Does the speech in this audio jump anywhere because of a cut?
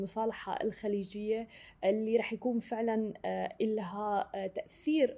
no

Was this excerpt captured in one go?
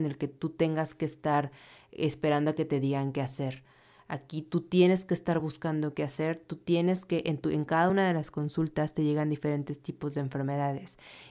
yes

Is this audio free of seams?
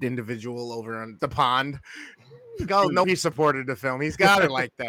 no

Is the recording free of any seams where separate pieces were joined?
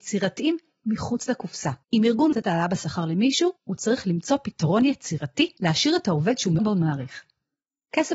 no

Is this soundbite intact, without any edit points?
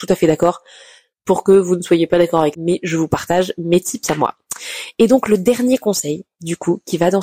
no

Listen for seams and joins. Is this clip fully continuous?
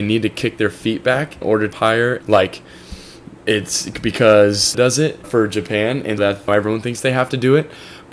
no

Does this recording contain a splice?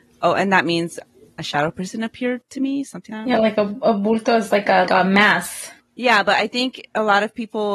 yes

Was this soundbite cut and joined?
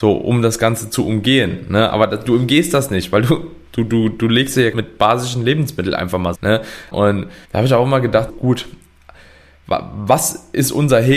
yes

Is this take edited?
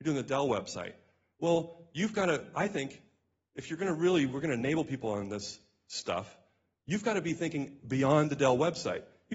no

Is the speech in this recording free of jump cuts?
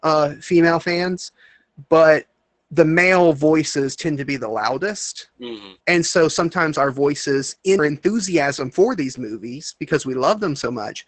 no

